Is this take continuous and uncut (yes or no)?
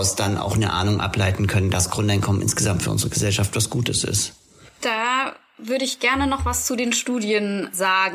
yes